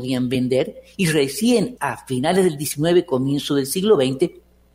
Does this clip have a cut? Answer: yes; 1 cut; at 1.8 s

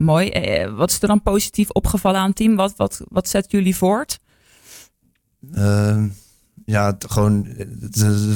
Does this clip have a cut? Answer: no; 0 cuts

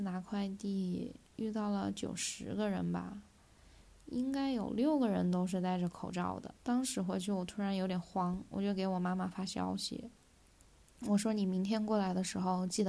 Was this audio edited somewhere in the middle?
yes; 1 cut; at 6.6 s

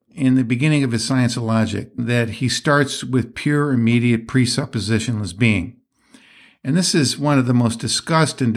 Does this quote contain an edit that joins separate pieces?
no; 0 cuts

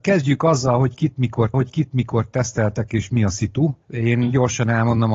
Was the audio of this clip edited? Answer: yes; 2 cuts; at 1.5 s, 3.8 s

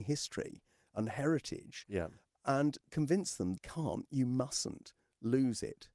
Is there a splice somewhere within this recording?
yes; 2 cuts; at 2.8 s, 3.6 s

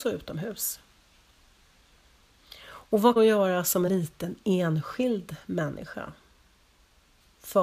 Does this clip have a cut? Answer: yes; 2 cuts; at 3.2 s, 3.9 s

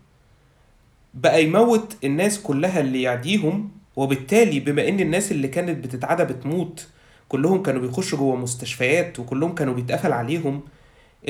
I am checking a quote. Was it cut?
yes; 1 cut; at 3.8 s

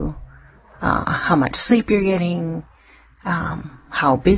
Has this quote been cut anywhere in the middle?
no; 0 cuts

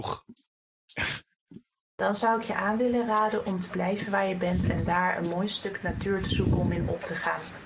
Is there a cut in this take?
no; 0 cuts

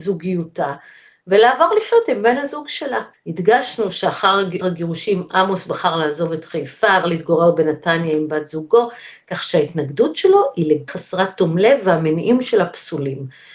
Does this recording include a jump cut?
yes; 4 cuts; at 3.1 s, 4.6 s, 7.0 s, 10.9 s

